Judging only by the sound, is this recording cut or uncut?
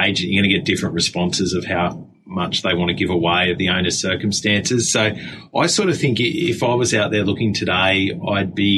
uncut